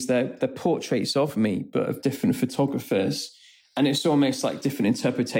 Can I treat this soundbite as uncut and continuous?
yes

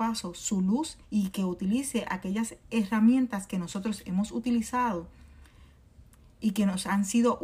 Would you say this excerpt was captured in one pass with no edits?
no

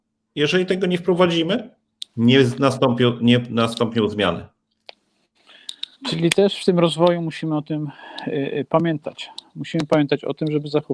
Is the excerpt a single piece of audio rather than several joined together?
no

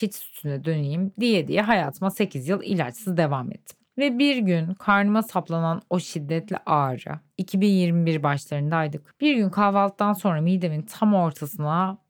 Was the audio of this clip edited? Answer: no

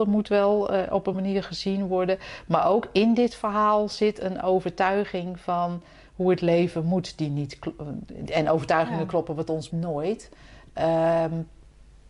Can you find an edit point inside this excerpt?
yes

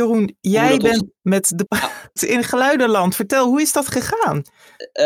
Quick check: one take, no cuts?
no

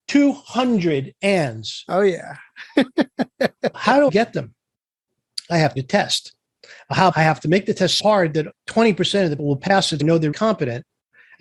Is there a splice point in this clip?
yes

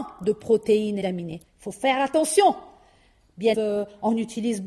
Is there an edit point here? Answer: yes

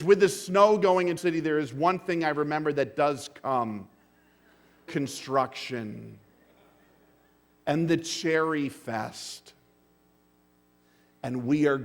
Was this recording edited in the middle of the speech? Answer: yes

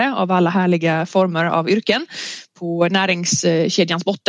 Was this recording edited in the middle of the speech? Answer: no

